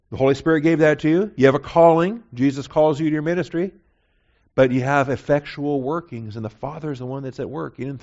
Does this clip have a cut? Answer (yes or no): yes